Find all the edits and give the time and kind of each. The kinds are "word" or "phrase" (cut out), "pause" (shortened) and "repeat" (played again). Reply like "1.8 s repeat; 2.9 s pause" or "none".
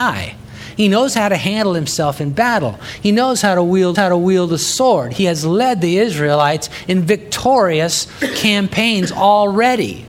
3.9 s repeat